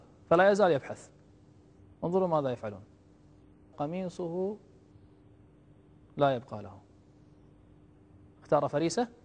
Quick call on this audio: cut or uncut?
cut